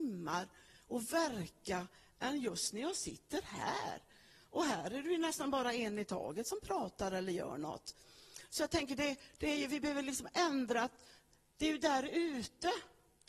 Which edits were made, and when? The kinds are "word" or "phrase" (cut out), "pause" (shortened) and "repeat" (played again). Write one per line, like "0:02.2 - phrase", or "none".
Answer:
none